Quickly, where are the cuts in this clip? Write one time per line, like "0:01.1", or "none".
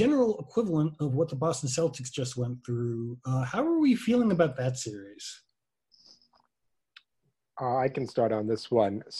none